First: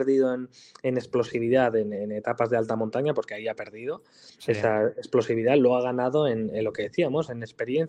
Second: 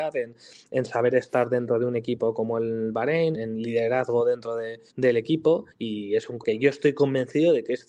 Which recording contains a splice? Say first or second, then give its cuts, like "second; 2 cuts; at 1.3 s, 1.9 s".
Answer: second; 4 cuts; at 3.3 s, 4.9 s, 5.7 s, 6.4 s